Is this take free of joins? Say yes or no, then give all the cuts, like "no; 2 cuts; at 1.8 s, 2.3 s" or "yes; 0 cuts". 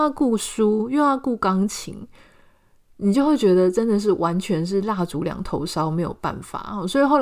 yes; 0 cuts